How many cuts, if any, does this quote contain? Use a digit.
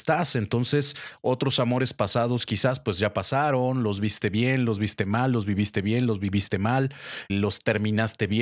1